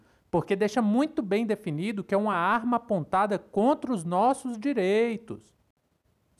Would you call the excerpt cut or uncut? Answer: uncut